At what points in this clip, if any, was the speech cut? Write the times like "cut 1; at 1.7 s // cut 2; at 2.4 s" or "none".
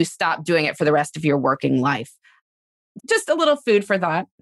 cut 1; at 3.0 s